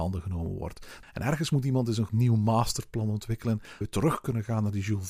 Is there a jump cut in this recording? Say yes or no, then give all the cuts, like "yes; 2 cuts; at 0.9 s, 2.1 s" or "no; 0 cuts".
yes; 2 cuts; at 2.1 s, 3.8 s